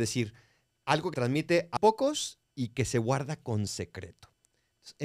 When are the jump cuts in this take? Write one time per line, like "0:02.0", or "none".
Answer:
0:01.1
0:01.8
0:02.4